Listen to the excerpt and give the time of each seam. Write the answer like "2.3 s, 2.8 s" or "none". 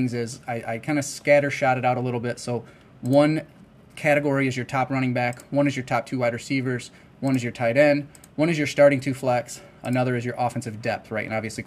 none